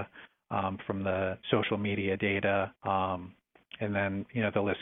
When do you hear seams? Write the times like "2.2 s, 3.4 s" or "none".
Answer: 1.4 s, 2.8 s